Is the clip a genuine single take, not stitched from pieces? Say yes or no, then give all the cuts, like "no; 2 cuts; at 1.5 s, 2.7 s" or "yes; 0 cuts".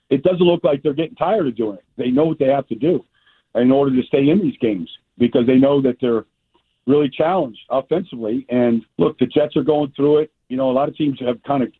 no; 1 cut; at 8.9 s